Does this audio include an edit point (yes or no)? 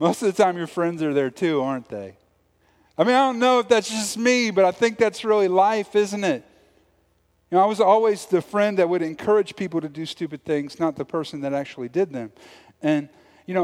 no